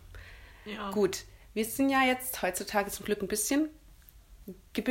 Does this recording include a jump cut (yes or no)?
no